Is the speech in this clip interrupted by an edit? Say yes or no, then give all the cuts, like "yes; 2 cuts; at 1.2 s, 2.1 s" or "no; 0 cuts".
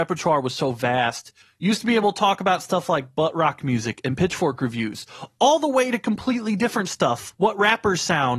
yes; 2 cuts; at 1.4 s, 7.3 s